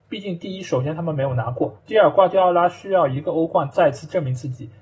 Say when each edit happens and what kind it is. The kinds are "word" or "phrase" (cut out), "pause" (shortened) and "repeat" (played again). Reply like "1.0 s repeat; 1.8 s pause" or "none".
1.8 s pause